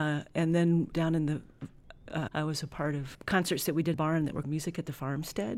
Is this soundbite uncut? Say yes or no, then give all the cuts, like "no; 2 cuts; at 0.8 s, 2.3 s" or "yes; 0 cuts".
no; 5 cuts; at 0.9 s, 2.3 s, 3.1 s, 3.9 s, 4.4 s